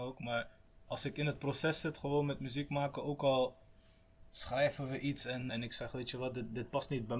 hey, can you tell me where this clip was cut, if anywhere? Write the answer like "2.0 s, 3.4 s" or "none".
5.5 s